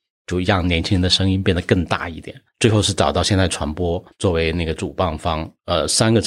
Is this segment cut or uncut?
cut